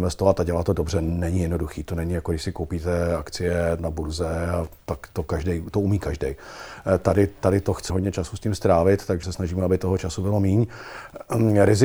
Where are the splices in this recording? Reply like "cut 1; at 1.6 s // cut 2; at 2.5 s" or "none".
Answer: cut 1; at 3.8 s // cut 2; at 7.9 s // cut 3; at 9.2 s